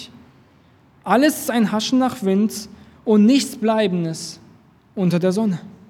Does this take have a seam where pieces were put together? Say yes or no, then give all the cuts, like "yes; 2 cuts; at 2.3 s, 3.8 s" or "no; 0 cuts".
no; 0 cuts